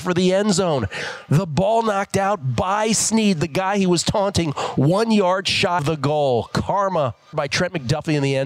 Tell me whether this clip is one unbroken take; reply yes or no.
no